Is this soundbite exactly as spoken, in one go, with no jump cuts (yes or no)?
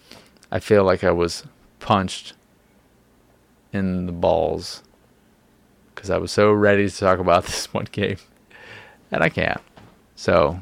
yes